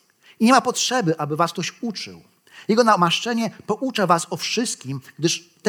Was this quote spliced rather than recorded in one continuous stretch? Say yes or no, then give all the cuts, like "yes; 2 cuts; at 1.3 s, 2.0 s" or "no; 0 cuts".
no; 0 cuts